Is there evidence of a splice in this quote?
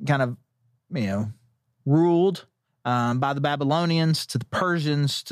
no; 0 cuts

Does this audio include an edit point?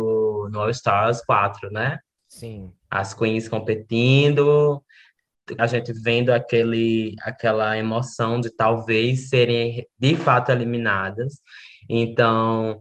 yes; 3 cuts; at 2.8 s, 5.6 s, 8.4 s

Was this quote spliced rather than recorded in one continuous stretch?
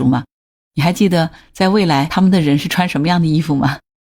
no; 0 cuts

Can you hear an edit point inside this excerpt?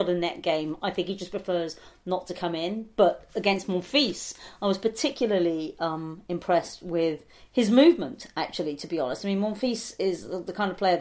no; 0 cuts

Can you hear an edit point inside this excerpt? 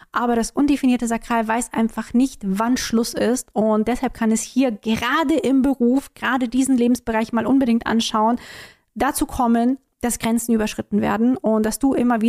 no; 0 cuts

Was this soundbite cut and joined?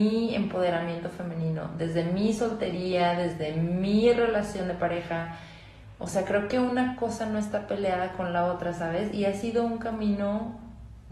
no; 0 cuts

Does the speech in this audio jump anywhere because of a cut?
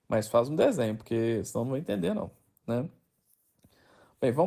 no; 0 cuts

